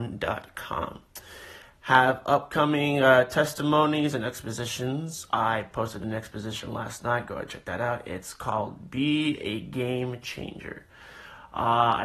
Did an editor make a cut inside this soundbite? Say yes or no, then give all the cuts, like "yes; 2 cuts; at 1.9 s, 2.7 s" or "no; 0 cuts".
no; 0 cuts